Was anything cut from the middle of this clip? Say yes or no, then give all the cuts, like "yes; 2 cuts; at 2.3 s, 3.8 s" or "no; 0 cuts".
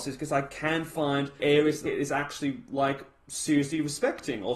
yes; 2 cuts; at 1.4 s, 1.9 s